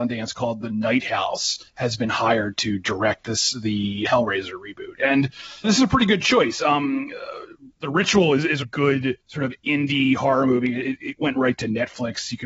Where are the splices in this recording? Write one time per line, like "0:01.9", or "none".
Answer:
0:01.7
0:04.0
0:05.6
0:07.7
0:08.6
0:09.2